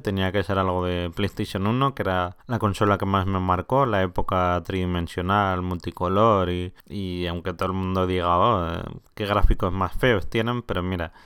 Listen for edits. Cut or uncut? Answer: cut